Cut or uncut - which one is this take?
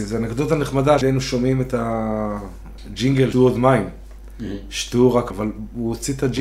cut